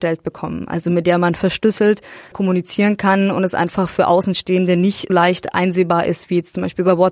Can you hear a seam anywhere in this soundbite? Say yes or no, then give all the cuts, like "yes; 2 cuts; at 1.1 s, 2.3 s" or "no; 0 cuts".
yes; 2 cuts; at 2.3 s, 5.1 s